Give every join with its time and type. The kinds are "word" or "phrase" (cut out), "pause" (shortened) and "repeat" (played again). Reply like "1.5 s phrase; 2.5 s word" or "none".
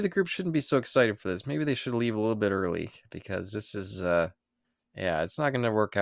none